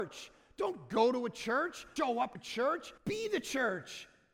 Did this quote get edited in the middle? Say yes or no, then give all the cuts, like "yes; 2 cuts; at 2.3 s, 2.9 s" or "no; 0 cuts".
yes; 3 cuts; at 2.0 s, 2.3 s, 3.0 s